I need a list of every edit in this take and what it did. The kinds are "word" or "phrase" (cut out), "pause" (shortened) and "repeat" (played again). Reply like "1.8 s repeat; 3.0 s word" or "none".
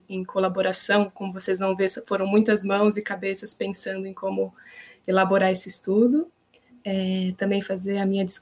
none